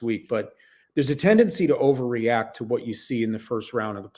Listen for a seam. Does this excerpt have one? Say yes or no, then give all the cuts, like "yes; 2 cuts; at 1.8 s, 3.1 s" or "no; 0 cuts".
no; 0 cuts